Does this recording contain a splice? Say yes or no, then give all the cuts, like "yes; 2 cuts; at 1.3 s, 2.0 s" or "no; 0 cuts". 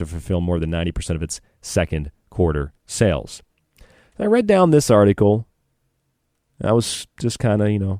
yes; 1 cut; at 2.8 s